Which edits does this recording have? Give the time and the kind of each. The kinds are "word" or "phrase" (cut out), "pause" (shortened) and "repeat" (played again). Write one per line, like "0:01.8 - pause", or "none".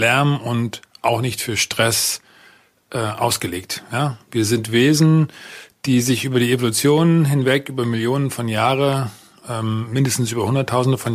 none